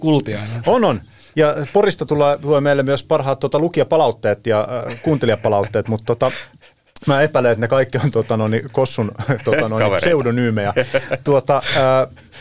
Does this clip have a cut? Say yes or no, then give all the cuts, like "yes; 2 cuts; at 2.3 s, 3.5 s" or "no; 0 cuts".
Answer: no; 0 cuts